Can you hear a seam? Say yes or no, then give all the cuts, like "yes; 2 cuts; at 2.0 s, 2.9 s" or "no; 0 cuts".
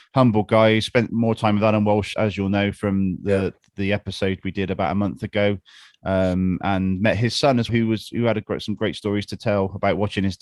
yes; 2 cuts; at 2.1 s, 7.7 s